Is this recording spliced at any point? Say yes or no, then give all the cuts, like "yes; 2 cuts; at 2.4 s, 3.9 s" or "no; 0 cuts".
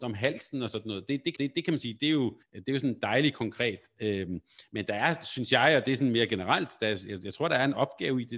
yes; 2 cuts; at 1.4 s, 2.4 s